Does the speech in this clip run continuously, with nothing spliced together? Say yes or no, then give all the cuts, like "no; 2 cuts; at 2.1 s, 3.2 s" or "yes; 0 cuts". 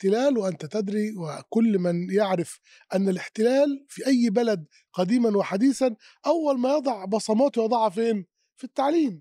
yes; 0 cuts